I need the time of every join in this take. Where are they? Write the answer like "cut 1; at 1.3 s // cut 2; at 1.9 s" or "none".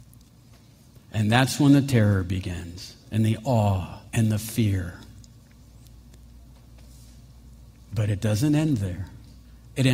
cut 1; at 3.0 s // cut 2; at 4.1 s

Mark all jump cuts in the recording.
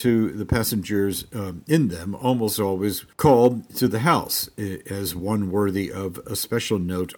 cut 1; at 3.1 s

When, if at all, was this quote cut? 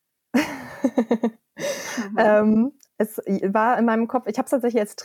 cut 1; at 2.9 s

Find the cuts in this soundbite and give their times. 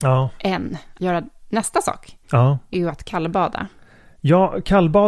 cut 1; at 1.0 s // cut 2; at 2.7 s

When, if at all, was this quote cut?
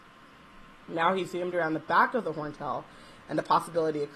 none

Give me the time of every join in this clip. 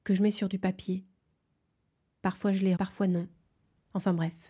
cut 1; at 2.8 s

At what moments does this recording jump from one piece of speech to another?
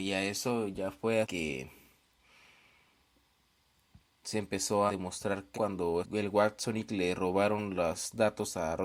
cut 1; at 1.2 s // cut 2; at 4.9 s // cut 3; at 5.5 s // cut 4; at 6.0 s // cut 5; at 6.9 s

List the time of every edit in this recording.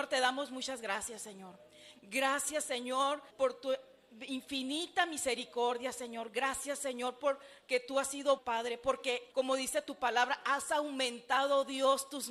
cut 1; at 3.3 s // cut 2; at 8.4 s // cut 3; at 9.3 s

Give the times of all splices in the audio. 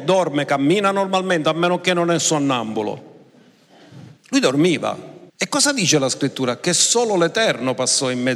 cut 1; at 4.2 s // cut 2; at 5.3 s

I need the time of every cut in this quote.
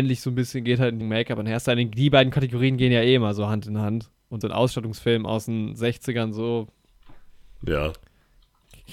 cut 1; at 1.0 s // cut 2; at 4.4 s

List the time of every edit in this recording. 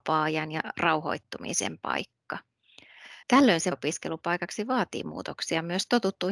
cut 1; at 3.2 s // cut 2; at 3.7 s

